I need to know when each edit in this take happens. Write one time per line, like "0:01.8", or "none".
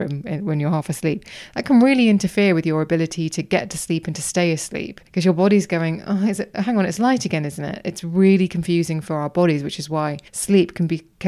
0:05.1
0:10.3